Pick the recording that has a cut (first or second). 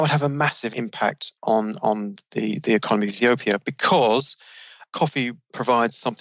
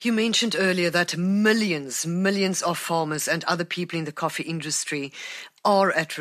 first